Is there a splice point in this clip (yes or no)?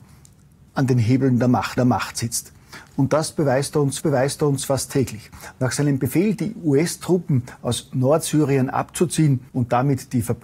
yes